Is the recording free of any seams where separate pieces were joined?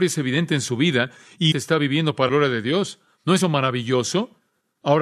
no; 3 cuts; at 1.5 s, 2.3 s, 3.4 s

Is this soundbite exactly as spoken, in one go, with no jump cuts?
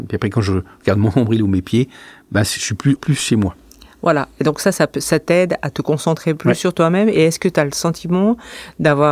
no; 1 cut; at 3.0 s

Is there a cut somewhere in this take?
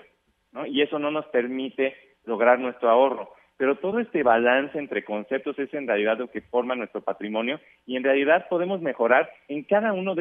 no; 0 cuts

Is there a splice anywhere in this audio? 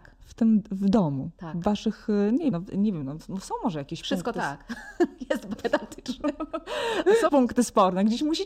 yes; 3 cuts; at 2.5 s, 5.6 s, 7.3 s

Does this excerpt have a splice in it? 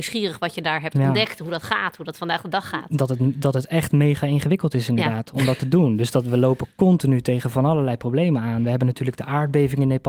no; 0 cuts

